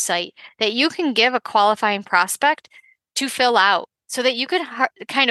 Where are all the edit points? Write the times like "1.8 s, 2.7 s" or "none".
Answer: none